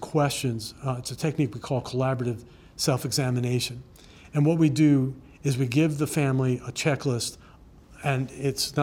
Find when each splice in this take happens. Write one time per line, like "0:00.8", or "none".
none

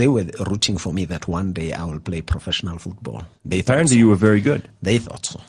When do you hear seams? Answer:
0:03.4

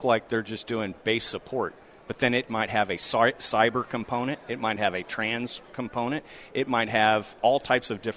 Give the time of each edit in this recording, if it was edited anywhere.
none

